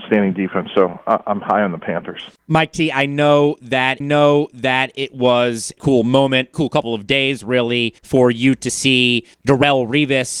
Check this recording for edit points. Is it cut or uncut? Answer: cut